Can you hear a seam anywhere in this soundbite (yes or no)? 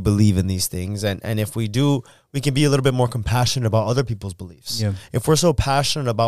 no